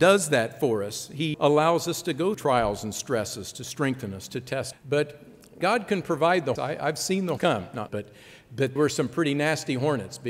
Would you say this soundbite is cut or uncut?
cut